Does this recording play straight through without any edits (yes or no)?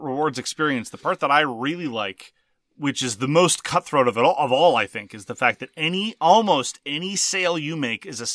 yes